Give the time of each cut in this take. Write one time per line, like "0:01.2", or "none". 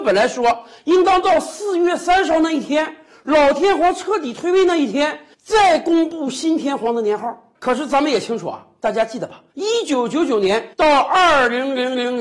0:05.3
0:09.5
0:10.7